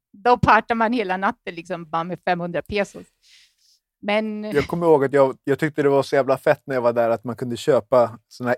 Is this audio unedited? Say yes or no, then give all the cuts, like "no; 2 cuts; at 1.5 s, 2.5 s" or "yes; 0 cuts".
yes; 0 cuts